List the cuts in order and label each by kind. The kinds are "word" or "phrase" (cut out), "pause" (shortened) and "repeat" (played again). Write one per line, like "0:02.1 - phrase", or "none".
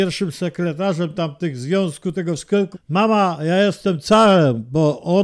0:02.7 - word